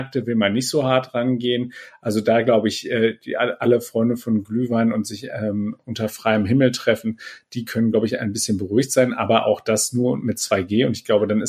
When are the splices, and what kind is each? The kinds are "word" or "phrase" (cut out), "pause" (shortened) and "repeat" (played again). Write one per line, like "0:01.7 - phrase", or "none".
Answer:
none